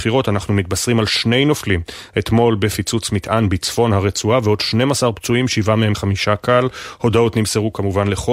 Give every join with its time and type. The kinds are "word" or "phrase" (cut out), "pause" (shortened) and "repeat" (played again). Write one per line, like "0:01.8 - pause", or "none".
0:05.9 - word